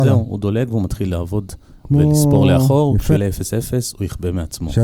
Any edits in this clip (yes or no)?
yes